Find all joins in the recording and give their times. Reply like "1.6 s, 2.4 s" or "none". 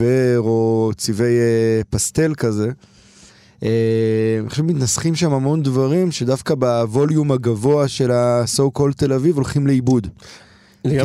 none